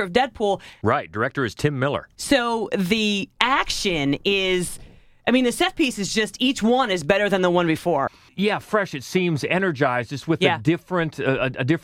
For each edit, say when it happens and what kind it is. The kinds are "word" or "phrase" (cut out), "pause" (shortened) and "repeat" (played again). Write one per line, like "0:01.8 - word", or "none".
none